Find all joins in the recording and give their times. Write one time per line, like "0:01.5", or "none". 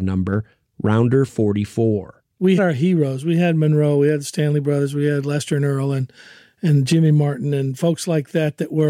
0:02.6